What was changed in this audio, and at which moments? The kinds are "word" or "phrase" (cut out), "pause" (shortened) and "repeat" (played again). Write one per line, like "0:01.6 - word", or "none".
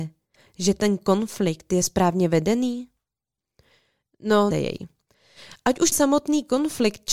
0:04.5 - word
0:05.9 - word